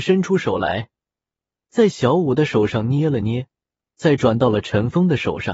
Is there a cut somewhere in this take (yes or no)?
no